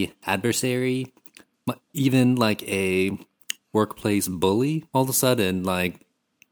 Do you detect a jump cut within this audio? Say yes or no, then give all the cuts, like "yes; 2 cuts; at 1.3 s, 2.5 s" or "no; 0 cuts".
yes; 1 cut; at 4.9 s